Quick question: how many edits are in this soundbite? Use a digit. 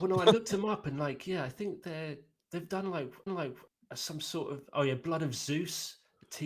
1